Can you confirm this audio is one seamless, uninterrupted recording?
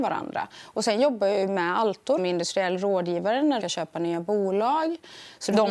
no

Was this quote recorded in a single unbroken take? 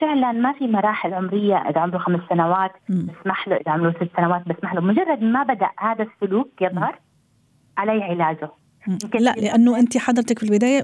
no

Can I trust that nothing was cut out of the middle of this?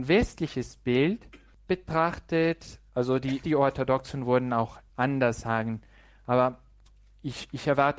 no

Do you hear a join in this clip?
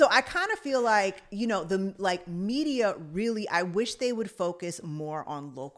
no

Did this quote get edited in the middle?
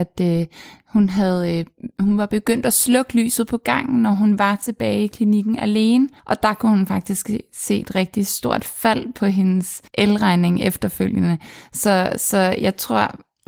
yes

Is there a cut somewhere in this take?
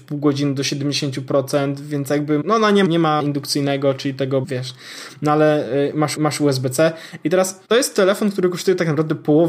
yes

